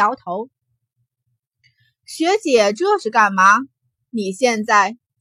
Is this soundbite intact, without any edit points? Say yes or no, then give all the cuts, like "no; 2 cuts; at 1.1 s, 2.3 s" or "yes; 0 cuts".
yes; 0 cuts